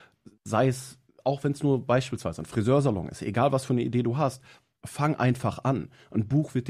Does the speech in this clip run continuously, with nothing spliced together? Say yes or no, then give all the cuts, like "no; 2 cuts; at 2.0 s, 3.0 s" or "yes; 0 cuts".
yes; 0 cuts